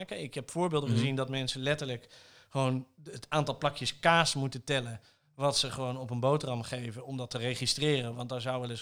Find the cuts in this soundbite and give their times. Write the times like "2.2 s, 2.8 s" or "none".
none